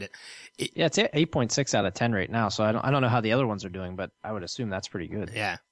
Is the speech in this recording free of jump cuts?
yes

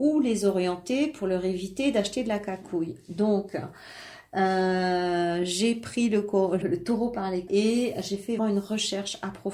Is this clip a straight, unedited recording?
no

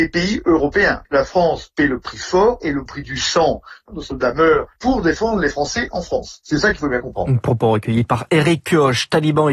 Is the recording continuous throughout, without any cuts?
yes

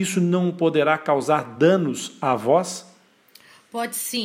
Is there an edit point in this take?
no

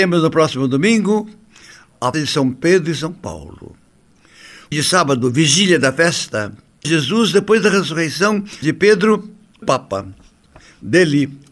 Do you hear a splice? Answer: yes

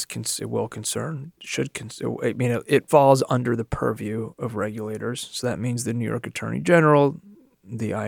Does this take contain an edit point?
no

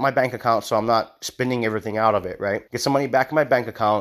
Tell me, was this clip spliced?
yes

